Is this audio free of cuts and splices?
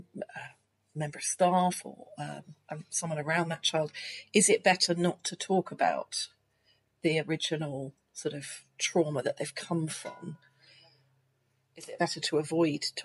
yes; 0 cuts

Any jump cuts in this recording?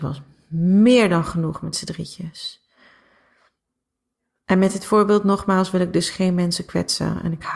no; 0 cuts

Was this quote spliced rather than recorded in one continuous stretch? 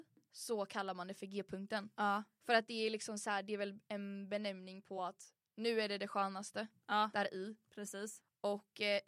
no; 0 cuts

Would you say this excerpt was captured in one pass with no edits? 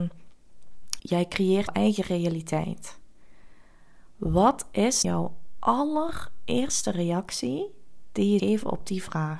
no; 4 cuts; at 1.0 s, 1.7 s, 5.0 s, 8.4 s

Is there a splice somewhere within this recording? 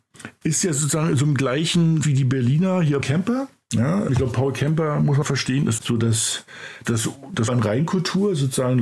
yes; 7 cuts; at 2.0 s, 3.0 s, 4.1 s, 5.2 s, 5.8 s, 6.8 s, 7.5 s

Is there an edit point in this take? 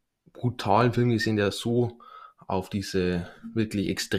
no; 0 cuts

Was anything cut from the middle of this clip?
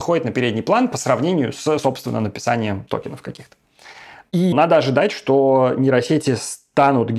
yes; 1 cut; at 4.5 s

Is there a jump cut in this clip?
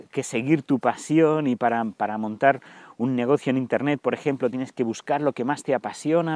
no; 0 cuts

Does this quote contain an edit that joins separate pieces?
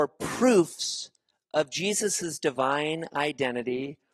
no; 0 cuts

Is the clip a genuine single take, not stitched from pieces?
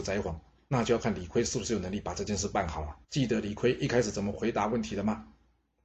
no; 1 cut; at 3.0 s

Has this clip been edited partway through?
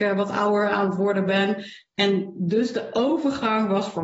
no; 0 cuts

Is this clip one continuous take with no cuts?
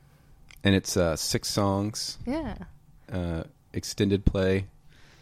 yes; 0 cuts

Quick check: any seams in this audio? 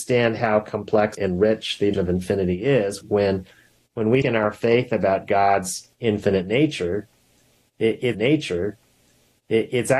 yes; 6 cuts; at 1.1 s, 1.9 s, 3.0 s, 4.2 s, 5.9 s, 8.1 s

